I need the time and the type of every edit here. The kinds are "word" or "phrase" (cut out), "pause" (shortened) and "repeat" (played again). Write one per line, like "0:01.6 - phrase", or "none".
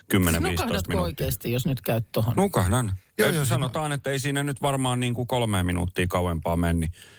none